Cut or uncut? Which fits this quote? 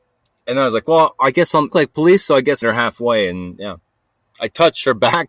cut